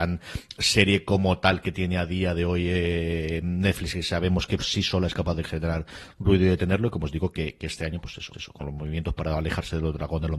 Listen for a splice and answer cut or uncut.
cut